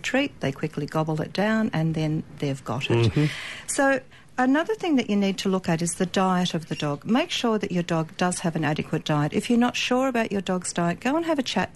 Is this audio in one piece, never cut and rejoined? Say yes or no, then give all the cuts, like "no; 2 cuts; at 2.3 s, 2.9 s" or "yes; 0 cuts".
yes; 0 cuts